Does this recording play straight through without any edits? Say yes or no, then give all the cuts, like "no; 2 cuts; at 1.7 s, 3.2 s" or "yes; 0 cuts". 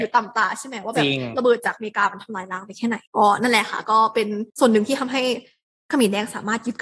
no; 2 cuts; at 3.1 s, 4.5 s